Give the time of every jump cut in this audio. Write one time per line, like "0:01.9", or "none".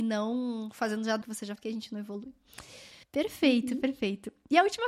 0:01.2
0:01.6
0:03.0